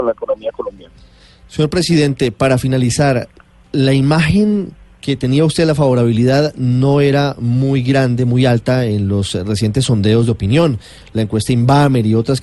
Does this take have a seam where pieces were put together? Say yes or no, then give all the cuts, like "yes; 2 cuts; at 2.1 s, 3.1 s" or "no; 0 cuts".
no; 0 cuts